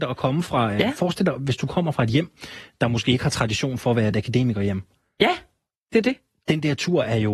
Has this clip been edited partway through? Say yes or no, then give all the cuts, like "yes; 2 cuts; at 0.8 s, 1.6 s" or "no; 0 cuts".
no; 0 cuts